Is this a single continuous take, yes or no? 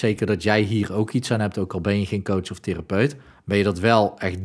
yes